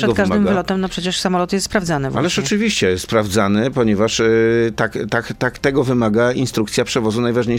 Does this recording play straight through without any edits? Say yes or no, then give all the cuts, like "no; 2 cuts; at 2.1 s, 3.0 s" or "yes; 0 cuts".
yes; 0 cuts